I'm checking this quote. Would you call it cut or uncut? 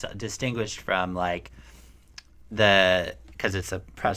uncut